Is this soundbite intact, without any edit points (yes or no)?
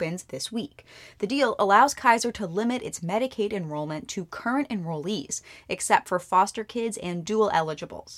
yes